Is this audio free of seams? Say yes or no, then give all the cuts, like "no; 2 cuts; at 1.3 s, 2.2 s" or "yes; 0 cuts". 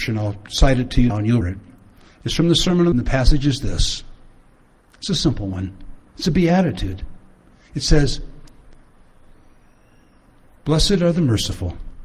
no; 3 cuts; at 1.1 s, 1.4 s, 2.9 s